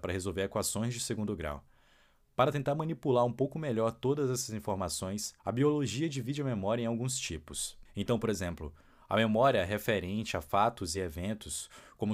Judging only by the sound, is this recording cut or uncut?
uncut